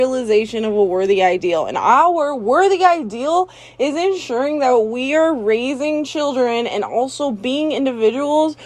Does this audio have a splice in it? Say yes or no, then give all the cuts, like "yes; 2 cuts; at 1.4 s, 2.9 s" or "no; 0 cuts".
no; 0 cuts